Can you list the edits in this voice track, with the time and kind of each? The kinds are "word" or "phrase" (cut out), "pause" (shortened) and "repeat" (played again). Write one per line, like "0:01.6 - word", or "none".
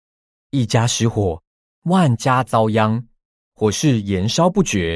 none